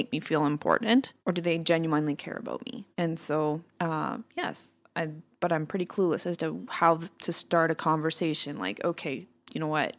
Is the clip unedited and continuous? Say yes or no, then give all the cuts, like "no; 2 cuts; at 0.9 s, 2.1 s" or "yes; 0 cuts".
no; 3 cuts; at 1.2 s, 2.9 s, 3.7 s